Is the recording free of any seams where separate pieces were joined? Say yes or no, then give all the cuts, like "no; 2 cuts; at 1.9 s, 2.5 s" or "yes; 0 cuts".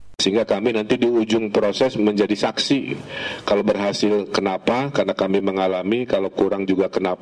yes; 0 cuts